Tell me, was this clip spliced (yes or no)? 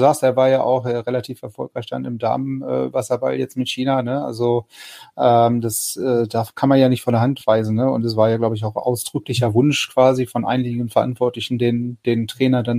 no